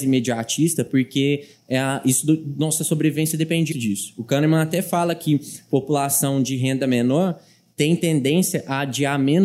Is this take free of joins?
no; 1 cut; at 3.7 s

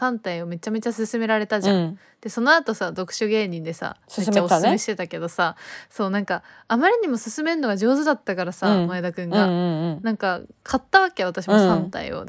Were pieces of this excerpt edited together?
no; 0 cuts

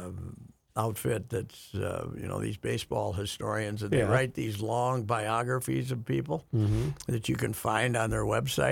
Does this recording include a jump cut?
no; 0 cuts

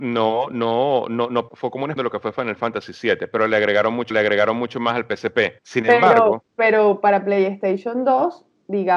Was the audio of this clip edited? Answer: yes; 4 cuts; at 1.5 s, 2.0 s, 4.1 s, 5.6 s

